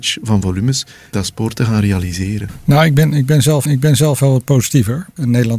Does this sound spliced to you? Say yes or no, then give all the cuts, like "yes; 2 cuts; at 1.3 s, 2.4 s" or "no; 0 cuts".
yes; 2 cuts; at 1.1 s, 3.7 s